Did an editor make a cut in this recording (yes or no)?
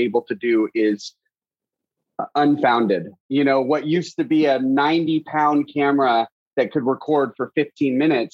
no